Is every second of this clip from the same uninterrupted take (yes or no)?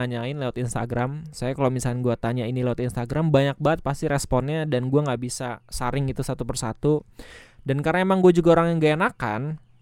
yes